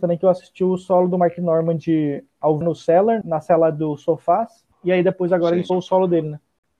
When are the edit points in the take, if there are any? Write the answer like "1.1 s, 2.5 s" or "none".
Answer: 2.6 s, 3.2 s, 4.7 s, 5.7 s